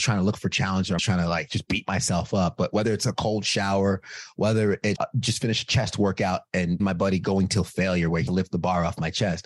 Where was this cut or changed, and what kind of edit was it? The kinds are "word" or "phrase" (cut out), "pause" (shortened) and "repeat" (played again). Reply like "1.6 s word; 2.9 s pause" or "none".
1.0 s word; 5.0 s word; 6.8 s word; 8.3 s word